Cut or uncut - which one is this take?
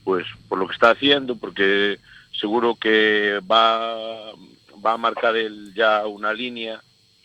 uncut